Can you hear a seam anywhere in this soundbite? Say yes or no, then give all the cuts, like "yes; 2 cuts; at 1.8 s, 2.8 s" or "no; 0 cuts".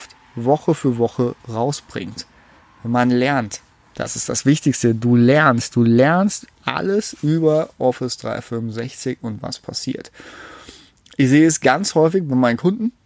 no; 0 cuts